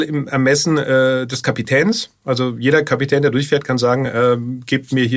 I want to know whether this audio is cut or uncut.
uncut